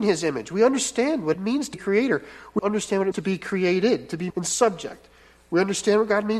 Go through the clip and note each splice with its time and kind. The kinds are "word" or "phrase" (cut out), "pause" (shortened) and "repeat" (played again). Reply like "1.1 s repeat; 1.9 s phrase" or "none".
1.3 s word; 1.7 s word; 2.6 s word; 3.1 s word; 4.3 s word

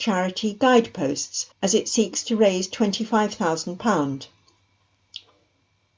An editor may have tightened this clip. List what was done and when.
1.5 s pause

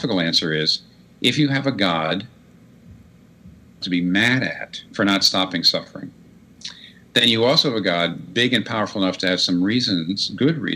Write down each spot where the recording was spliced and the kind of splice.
3.8 s phrase; 4.9 s pause

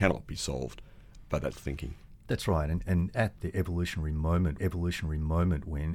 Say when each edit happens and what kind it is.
1.5 s phrase; 3.4 s word; 4.6 s repeat

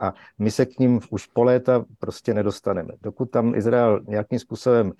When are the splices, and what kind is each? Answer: none

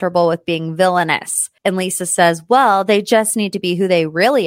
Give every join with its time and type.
1.6 s pause

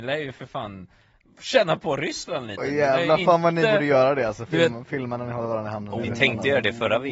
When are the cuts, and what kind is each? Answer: none

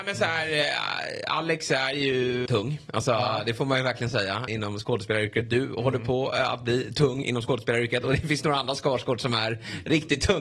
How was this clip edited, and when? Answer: 2.5 s word; 4.5 s word

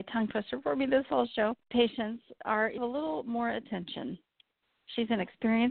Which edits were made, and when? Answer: 1.7 s word; 2.8 s word

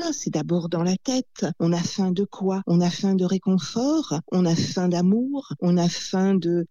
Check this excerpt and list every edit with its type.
none

